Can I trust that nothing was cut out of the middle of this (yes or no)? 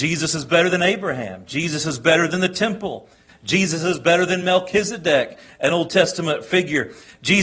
yes